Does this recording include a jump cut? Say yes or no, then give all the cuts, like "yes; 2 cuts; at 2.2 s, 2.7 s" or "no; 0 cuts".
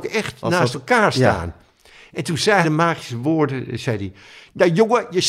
yes; 1 cut; at 2.6 s